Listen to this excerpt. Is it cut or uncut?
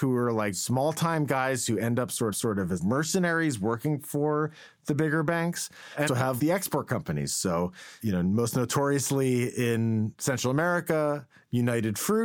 cut